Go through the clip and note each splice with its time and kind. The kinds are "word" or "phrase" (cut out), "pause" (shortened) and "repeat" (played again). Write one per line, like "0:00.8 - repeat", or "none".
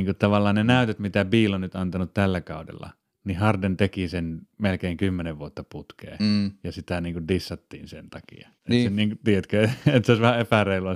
0:03.1 - pause
0:04.5 - pause
0:08.6 - pause